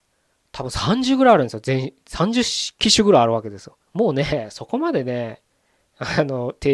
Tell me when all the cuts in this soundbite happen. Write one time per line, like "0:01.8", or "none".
0:03.8